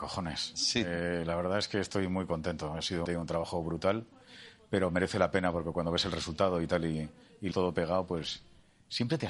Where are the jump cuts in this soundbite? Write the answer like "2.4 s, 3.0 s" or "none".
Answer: 3.1 s, 7.5 s